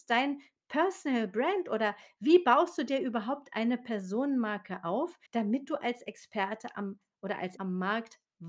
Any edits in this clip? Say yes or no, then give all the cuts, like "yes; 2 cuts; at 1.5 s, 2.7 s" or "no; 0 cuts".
yes; 2 cuts; at 5.3 s, 7.6 s